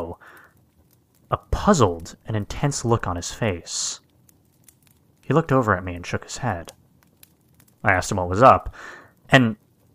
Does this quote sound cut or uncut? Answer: uncut